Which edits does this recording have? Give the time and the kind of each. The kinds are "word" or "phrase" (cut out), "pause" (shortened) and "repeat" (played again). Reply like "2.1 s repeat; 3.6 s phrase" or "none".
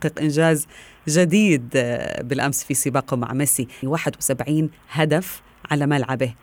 3.8 s word

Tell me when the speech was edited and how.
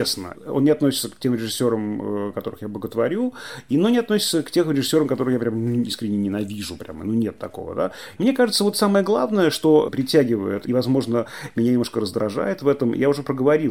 none

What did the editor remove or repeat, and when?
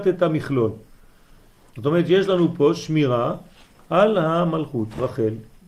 none

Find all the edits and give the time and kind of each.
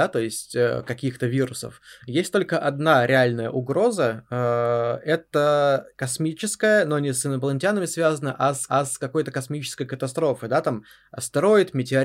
5.9 s pause; 8.7 s repeat

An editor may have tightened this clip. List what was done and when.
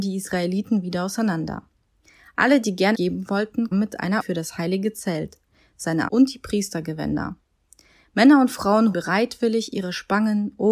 2.9 s word; 3.7 s word; 4.2 s word; 6.1 s word; 8.9 s word

